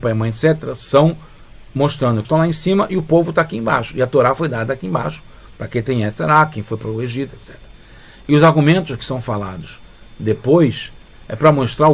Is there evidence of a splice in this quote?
yes; 2 cuts; at 2.2 s, 7.3 s

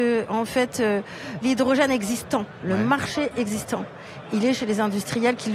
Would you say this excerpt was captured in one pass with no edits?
yes; 0 cuts

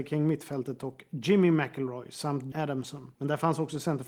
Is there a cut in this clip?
yes; 1 cut; at 2.5 s

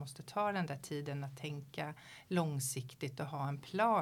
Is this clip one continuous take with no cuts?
yes; 0 cuts

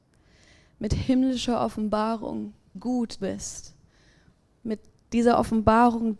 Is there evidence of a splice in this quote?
yes; 2 cuts; at 2.7 s, 3.2 s

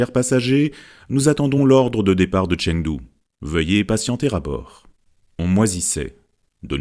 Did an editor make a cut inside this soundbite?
no; 0 cuts

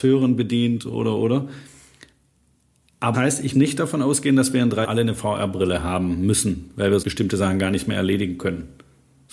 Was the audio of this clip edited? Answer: yes; 4 cuts; at 3.1 s, 3.5 s, 4.8 s, 7.0 s

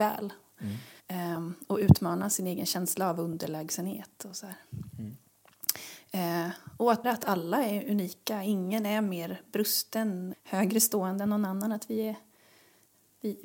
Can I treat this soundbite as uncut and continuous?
no; 3 cuts; at 1.0 s, 7.0 s, 10.3 s

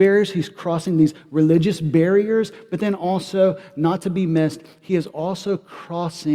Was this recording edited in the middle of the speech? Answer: no; 0 cuts

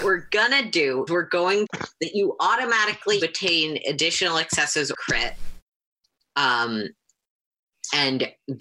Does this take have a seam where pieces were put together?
yes; 4 cuts; at 1.1 s, 1.6 s, 3.2 s, 4.9 s

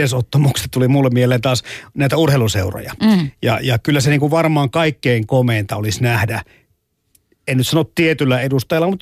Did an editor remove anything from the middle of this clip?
no; 0 cuts

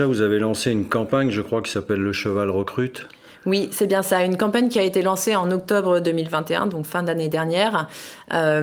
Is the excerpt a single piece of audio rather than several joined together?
yes; 0 cuts

